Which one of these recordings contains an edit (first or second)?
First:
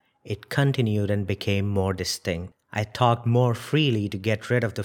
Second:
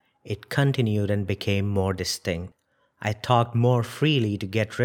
first